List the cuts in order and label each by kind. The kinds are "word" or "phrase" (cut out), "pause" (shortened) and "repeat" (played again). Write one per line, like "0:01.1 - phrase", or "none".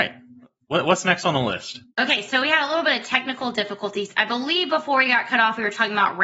0:01.9 - pause